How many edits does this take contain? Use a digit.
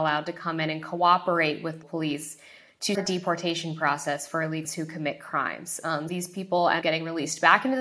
5